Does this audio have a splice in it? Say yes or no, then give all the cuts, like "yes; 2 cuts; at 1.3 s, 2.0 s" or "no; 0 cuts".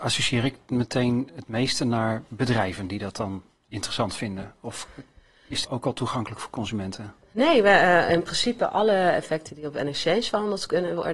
yes; 1 cut; at 5.6 s